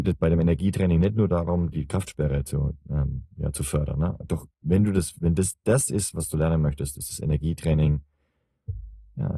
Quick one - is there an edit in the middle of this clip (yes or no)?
yes